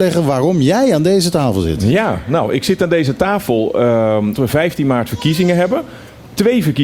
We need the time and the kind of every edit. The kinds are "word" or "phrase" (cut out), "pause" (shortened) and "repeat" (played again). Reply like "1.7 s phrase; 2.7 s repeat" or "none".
4.3 s word